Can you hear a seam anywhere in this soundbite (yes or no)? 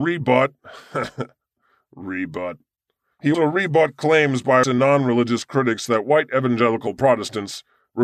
yes